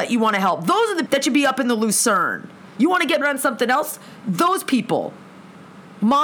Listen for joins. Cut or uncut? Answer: cut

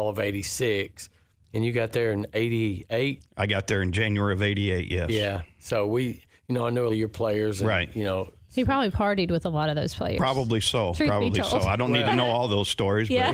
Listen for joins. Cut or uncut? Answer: cut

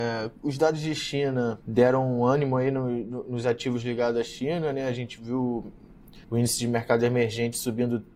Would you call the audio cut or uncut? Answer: cut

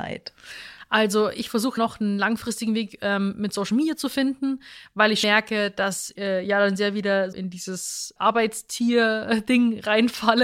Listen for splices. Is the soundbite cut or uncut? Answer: cut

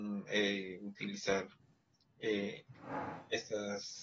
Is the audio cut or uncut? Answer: uncut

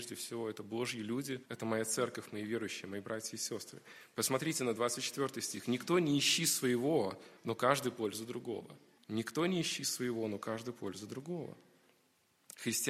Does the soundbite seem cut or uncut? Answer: cut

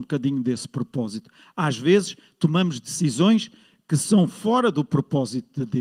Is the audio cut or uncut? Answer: uncut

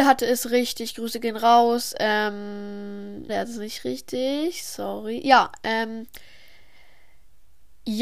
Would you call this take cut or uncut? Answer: cut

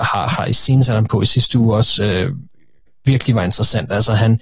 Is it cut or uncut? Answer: uncut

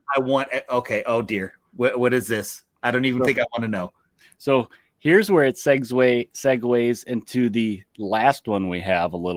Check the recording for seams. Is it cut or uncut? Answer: uncut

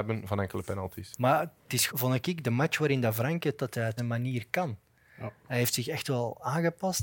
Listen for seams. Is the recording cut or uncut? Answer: cut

